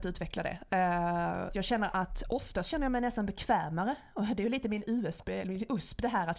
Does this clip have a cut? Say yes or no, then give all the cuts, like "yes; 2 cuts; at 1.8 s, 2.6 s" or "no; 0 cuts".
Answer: yes; 1 cut; at 1.5 s